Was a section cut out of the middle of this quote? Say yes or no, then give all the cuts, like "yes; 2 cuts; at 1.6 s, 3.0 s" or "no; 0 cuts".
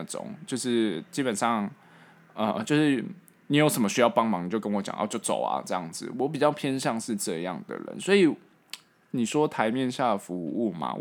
no; 0 cuts